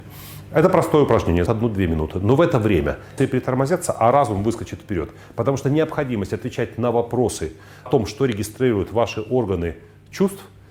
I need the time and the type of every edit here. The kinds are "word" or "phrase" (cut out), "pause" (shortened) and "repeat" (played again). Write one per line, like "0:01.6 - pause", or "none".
0:01.5 - word
0:03.2 - word
0:07.9 - word

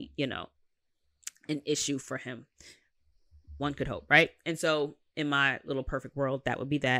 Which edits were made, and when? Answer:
none

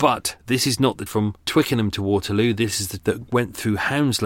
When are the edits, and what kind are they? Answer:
0:01.1 - word
0:01.4 - pause
0:03.0 - word

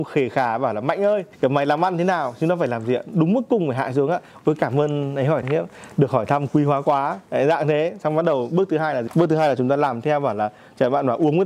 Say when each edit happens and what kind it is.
0:01.3 - pause
0:05.4 - word
0:07.3 - pause
0:09.1 - word

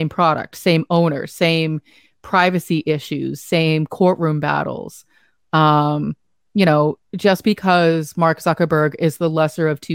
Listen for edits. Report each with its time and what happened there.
0:07.0 - pause

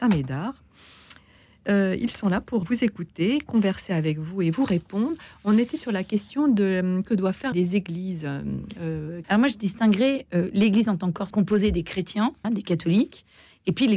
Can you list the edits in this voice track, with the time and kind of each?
0:02.6 - word
0:07.1 - word
0:07.5 - word
0:09.2 - word
0:11.3 - word
0:12.4 - word

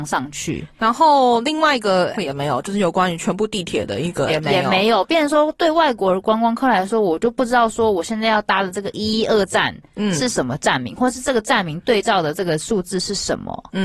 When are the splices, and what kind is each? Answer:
0:02.1 - word
0:04.3 - word

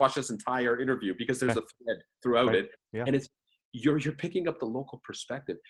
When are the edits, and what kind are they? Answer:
none

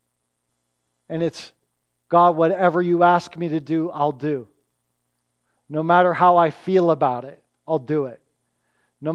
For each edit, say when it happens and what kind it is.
none

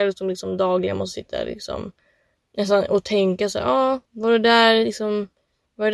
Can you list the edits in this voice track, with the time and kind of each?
0:04.0 - pause

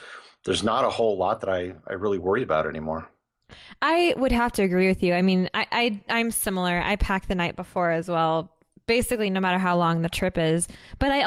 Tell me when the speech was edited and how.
none

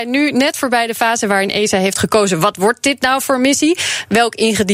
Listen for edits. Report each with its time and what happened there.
none

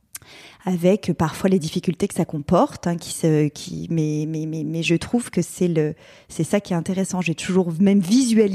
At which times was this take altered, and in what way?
none

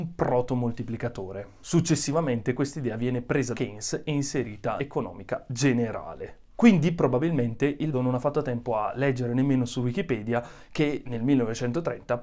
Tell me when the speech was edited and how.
0:03.5 - word
0:04.8 - phrase
0:07.9 - word

